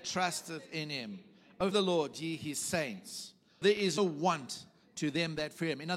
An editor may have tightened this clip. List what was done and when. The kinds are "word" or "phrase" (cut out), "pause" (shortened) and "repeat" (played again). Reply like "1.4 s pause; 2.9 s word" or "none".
1.7 s word; 3.6 s word; 4.0 s word